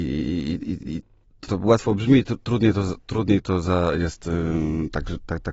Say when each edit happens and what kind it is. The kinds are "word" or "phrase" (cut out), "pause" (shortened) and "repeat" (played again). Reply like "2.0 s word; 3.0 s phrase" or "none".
1.5 s word